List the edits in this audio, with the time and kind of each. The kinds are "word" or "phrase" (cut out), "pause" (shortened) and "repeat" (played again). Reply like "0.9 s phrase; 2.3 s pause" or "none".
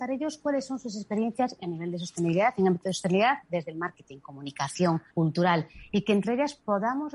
5.1 s pause